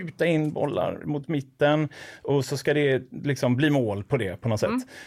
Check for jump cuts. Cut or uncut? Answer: uncut